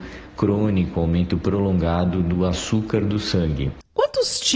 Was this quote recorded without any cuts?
yes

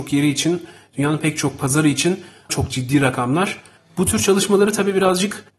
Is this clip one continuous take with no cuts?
no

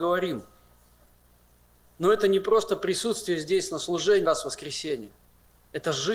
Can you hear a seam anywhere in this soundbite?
yes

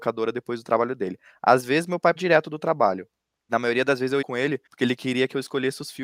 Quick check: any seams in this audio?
yes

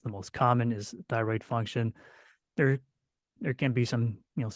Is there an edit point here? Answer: yes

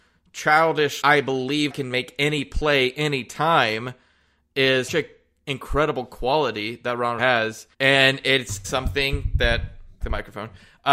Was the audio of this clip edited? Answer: yes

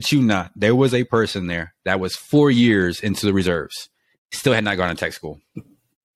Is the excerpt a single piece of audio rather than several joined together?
yes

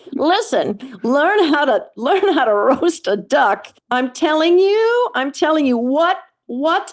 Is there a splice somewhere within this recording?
yes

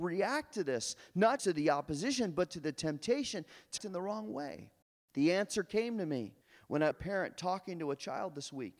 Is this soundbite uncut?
no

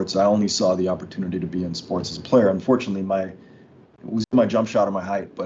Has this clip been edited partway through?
yes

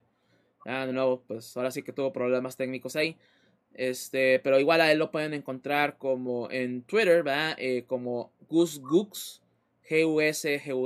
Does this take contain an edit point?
no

